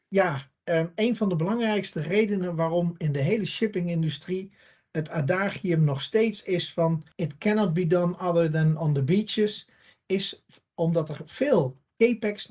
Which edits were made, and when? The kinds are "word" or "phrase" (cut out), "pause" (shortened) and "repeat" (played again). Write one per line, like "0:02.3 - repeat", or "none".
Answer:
0:07.1 - pause